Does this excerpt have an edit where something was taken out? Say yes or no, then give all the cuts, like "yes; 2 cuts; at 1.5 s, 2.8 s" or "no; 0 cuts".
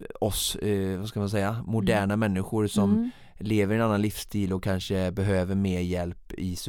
no; 0 cuts